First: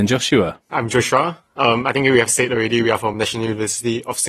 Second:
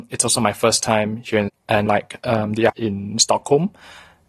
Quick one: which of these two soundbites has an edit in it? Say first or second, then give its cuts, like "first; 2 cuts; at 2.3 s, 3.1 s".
second; 3 cuts; at 1.5 s, 1.9 s, 2.7 s